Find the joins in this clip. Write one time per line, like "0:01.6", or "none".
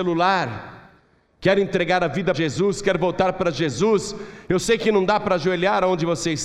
0:02.3

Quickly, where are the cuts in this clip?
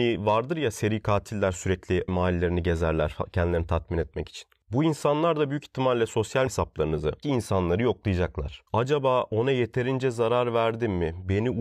0:02.1
0:06.5
0:07.2
0:08.7

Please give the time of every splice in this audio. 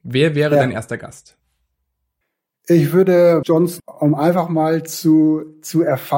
0:02.2
0:03.4
0:03.8

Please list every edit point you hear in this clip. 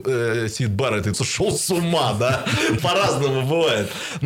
0:01.1
0:02.8

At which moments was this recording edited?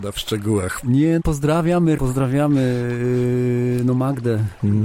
0:01.2
0:02.0

